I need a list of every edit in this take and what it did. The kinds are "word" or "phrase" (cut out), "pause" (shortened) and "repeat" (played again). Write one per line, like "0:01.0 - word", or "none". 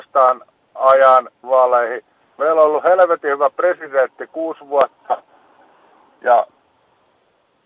0:01.4 - word

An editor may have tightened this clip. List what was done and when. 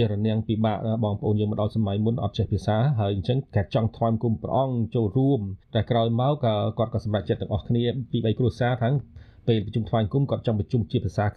0:05.6 - pause

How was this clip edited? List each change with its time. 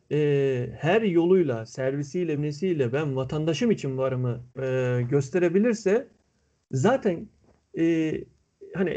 0:02.4 - word
0:04.5 - pause

